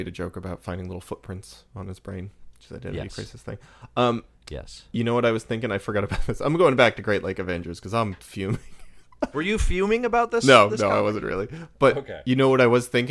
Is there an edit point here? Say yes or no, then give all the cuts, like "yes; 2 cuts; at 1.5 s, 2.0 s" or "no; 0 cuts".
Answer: yes; 2 cuts; at 8.2 s, 9.3 s